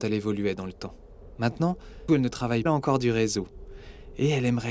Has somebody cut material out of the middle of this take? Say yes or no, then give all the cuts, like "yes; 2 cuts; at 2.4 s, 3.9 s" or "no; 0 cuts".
yes; 2 cuts; at 2.1 s, 2.7 s